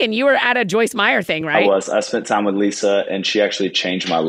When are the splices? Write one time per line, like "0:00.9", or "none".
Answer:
none